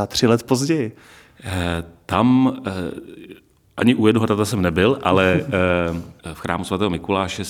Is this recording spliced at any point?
no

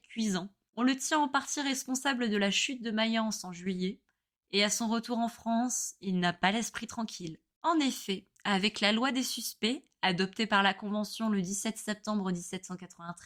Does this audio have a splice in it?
no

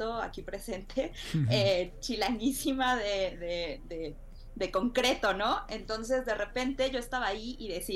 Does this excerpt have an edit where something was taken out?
no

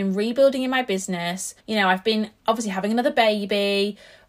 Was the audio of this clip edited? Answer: yes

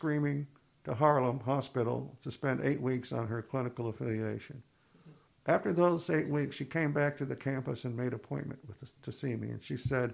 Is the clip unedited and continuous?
no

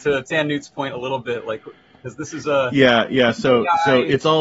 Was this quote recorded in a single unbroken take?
yes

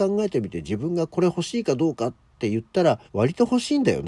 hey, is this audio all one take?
no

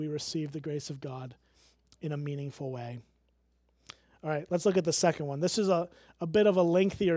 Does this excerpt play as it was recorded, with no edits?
yes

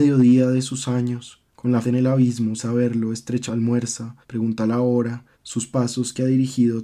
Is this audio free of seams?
no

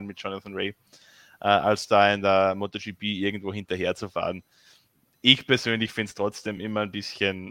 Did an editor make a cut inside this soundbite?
no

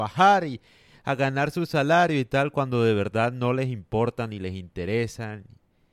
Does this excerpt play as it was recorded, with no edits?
yes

